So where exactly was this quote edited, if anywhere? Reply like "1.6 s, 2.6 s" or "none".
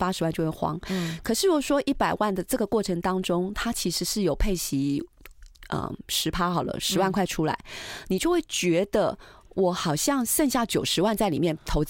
none